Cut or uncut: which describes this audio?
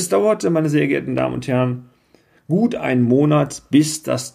uncut